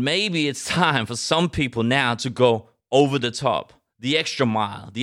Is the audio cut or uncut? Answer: uncut